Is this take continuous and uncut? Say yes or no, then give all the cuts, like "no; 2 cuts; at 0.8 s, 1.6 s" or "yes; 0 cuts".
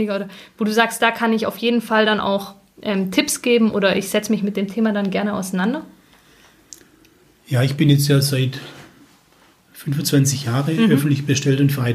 yes; 0 cuts